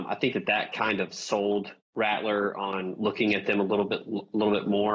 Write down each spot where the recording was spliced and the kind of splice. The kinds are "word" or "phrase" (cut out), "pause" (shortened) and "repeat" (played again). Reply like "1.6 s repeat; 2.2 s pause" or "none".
1.8 s pause